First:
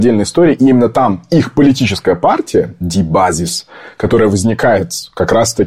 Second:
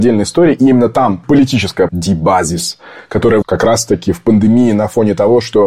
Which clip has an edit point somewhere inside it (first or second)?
second